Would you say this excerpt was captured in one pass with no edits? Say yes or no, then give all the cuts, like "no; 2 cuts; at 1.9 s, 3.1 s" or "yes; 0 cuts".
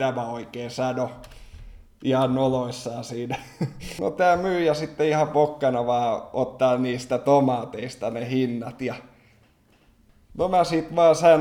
yes; 0 cuts